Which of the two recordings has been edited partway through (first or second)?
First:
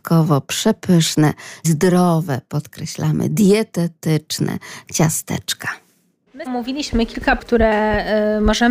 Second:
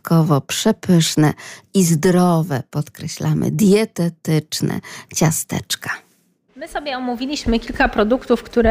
first